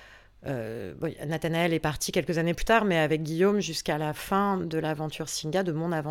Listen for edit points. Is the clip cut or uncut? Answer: uncut